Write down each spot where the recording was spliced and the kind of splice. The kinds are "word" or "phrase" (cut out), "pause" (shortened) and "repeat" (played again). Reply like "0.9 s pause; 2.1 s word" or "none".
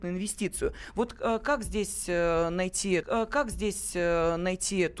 3.0 s repeat